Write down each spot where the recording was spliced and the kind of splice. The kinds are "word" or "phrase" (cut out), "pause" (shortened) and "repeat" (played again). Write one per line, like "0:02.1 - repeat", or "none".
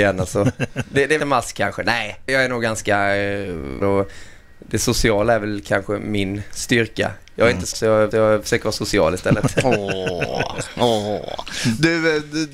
0:01.2 - phrase
0:02.3 - word
0:03.8 - word
0:07.7 - word
0:08.1 - repeat